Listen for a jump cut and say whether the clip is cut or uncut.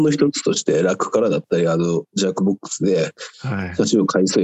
cut